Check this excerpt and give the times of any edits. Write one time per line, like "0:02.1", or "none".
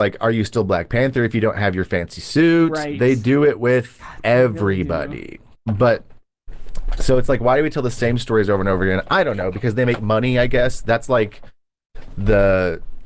0:05.5